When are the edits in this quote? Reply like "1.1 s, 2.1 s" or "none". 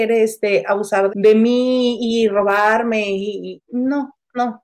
1.1 s, 3.6 s